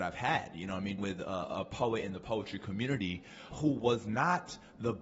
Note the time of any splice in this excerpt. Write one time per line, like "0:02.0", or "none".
0:01.0
0:03.5

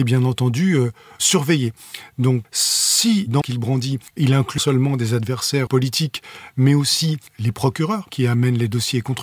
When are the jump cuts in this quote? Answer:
0:02.4
0:03.4
0:04.1
0:04.6
0:05.7
0:07.3

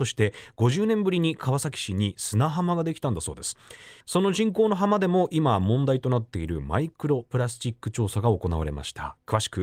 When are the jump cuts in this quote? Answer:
0:04.0

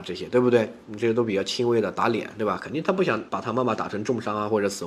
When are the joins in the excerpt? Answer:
0:03.3

